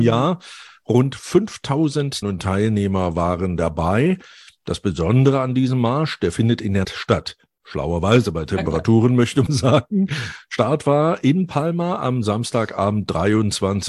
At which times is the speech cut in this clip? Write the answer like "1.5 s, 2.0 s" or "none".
2.2 s, 6.8 s, 8.5 s, 9.5 s